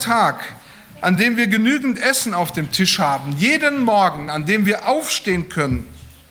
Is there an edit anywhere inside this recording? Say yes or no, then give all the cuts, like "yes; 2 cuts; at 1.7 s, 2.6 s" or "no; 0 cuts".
no; 0 cuts